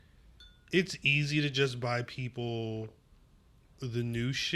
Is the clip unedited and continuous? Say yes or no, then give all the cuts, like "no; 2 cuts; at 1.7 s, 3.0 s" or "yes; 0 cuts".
yes; 0 cuts